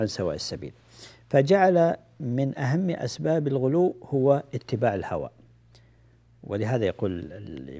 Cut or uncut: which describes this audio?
uncut